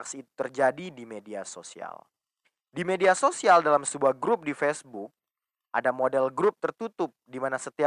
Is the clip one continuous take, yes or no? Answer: yes